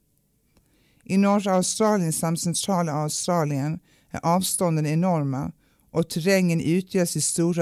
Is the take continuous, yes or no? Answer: yes